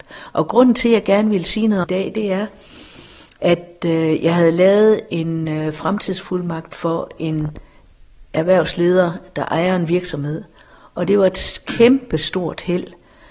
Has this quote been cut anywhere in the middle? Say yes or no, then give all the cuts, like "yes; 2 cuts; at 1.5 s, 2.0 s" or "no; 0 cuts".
yes; 1 cut; at 1.8 s